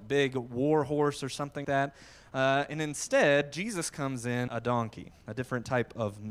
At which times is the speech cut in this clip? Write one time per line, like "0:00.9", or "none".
0:01.6
0:04.5